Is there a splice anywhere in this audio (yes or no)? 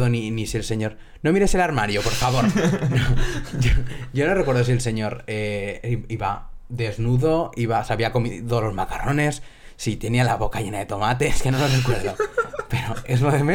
no